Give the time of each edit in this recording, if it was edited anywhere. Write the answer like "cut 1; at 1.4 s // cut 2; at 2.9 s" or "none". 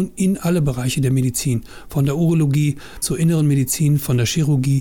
cut 1; at 3.0 s